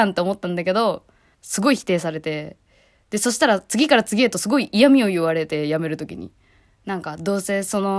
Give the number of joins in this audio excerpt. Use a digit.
1